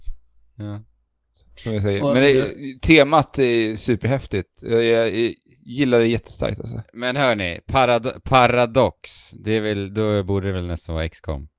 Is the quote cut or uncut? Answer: uncut